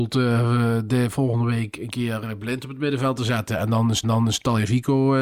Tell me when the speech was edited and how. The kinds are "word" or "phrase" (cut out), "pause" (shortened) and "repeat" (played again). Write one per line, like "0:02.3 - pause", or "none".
0:04.0 - repeat